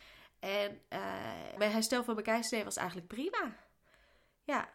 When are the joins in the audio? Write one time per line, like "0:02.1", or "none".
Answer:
0:01.6